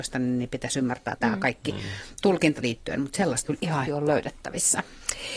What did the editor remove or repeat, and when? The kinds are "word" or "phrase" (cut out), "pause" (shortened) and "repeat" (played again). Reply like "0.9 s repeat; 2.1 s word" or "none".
1.2 s word; 2.6 s word; 3.4 s word; 3.9 s word